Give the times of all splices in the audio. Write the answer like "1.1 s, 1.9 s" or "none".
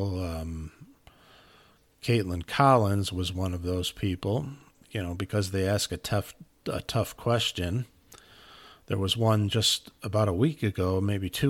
none